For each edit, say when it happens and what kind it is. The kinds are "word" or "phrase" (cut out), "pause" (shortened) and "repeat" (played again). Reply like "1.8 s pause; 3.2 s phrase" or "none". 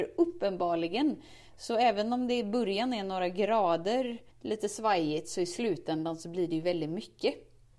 4.3 s pause